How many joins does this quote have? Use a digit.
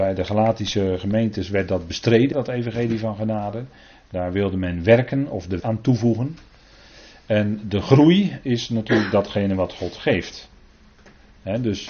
2